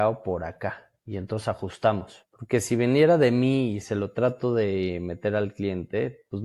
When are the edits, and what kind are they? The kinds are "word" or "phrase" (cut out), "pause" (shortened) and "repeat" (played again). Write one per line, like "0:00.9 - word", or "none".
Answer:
none

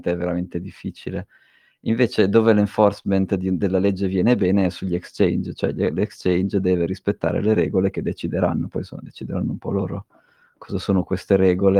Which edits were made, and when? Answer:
none

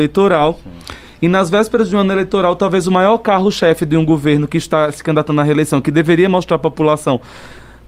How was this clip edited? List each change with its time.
none

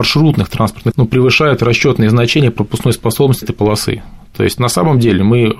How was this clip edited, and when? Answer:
0:00.9 - word
0:03.4 - word

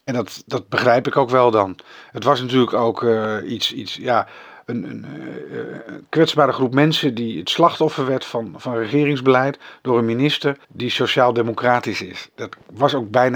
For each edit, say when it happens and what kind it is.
0:10.6 - pause

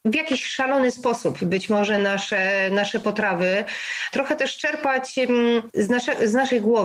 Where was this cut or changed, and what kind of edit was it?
none

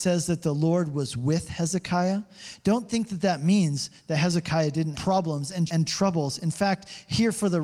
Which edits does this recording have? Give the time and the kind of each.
0:04.9 - word
0:05.7 - word

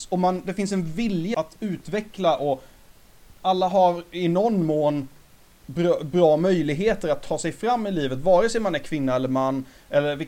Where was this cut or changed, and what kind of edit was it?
0:01.3 - word
0:03.3 - pause

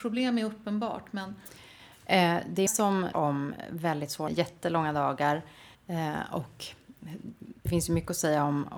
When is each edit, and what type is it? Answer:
0:02.7 - word
0:03.1 - word
0:04.3 - phrase
0:05.7 - pause
0:07.7 - word

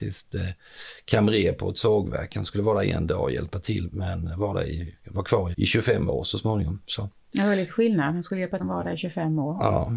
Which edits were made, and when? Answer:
0:03.9 - word
0:05.5 - word
0:08.6 - phrase

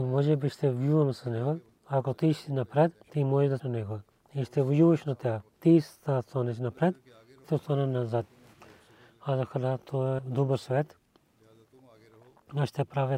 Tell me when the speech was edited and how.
0:01.7 - pause
0:03.0 - pause
0:03.6 - word
0:04.1 - pause
0:05.5 - pause
0:07.4 - word
0:10.2 - word

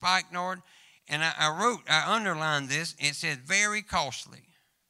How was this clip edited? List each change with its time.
none

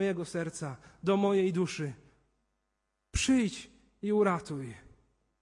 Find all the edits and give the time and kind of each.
none

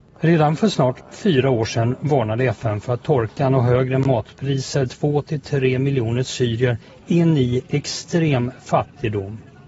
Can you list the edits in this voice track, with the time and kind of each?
0:04.9 - word

